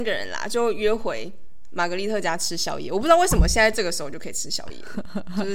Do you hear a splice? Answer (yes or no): no